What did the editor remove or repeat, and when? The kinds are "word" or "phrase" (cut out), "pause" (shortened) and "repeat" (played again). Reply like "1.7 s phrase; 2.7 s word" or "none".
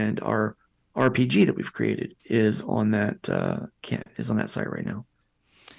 2.2 s pause